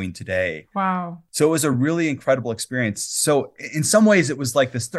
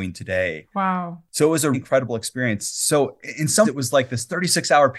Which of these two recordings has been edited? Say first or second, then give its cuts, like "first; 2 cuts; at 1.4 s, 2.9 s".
second; 2 cuts; at 1.7 s, 3.6 s